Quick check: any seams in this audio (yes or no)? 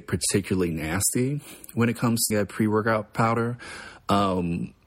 yes